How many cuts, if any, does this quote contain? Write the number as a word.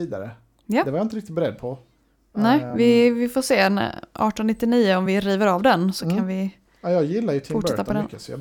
zero